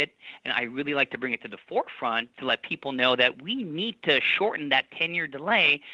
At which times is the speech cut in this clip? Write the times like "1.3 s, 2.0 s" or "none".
none